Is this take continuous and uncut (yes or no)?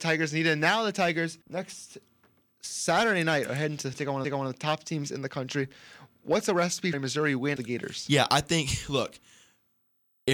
no